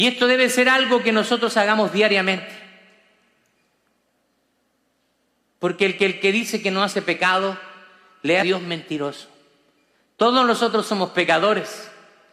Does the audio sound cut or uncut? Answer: cut